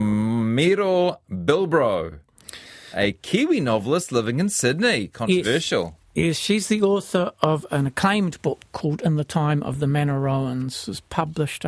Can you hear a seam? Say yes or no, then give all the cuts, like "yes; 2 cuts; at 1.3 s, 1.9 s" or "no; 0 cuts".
no; 0 cuts